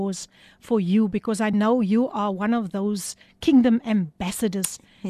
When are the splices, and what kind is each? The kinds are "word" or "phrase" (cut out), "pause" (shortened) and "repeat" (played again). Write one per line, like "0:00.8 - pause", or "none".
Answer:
none